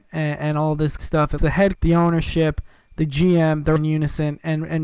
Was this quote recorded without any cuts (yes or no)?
no